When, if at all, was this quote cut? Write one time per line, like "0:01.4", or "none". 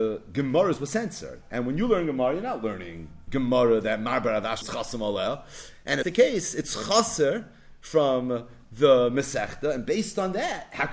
0:03.3
0:04.6
0:06.0